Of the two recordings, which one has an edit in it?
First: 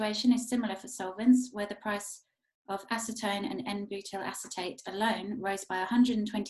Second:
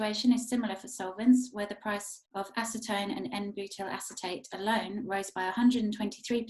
second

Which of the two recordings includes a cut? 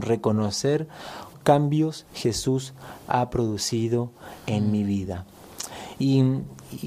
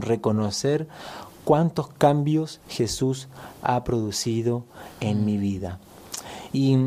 first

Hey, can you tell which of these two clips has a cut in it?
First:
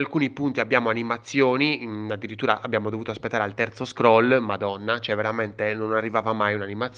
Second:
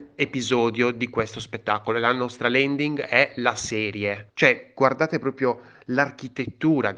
second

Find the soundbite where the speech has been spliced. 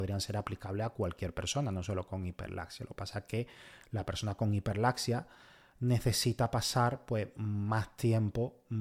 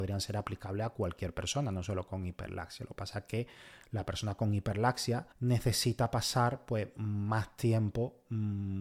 second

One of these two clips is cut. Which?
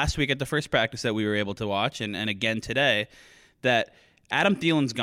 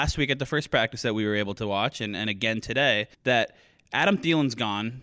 second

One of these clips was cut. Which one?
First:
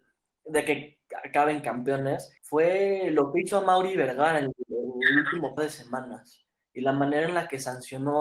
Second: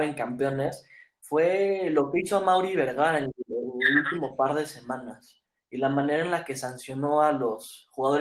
first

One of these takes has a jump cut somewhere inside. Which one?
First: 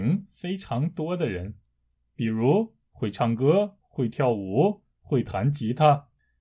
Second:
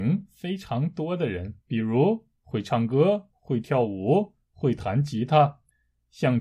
second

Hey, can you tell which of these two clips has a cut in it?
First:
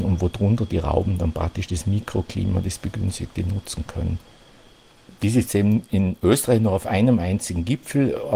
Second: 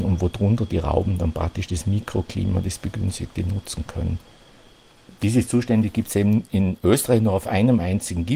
first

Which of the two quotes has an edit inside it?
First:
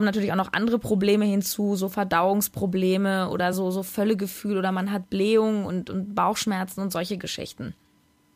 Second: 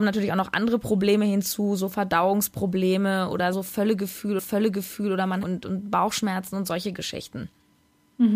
second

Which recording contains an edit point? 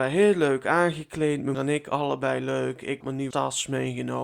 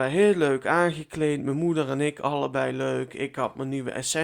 first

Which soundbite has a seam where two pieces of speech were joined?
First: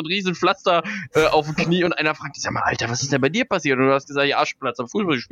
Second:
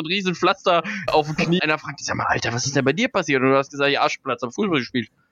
second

